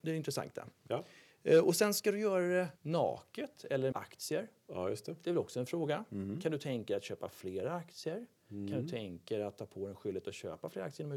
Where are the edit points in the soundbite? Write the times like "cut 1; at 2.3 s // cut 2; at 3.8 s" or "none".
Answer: cut 1; at 2.8 s // cut 2; at 3.9 s